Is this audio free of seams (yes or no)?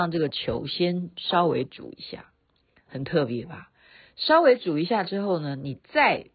no